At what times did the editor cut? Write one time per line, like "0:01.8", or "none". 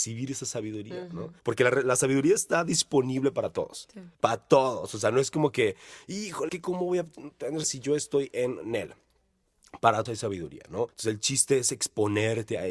0:01.4
0:04.1
0:06.5
0:07.6
0:10.1
0:10.9